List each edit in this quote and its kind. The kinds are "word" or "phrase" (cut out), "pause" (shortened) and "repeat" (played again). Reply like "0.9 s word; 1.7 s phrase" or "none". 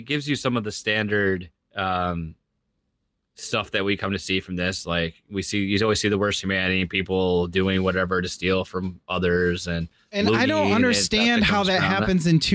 1.6 s pause